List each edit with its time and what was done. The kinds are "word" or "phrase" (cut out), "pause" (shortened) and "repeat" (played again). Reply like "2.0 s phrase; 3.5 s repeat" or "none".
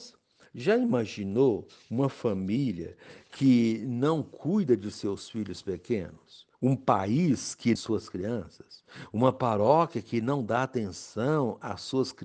6.5 s pause; 7.8 s phrase